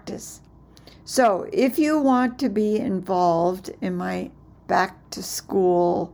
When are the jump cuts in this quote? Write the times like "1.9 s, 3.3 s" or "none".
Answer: 4.6 s